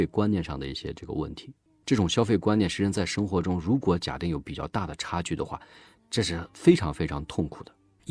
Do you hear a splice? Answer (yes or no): no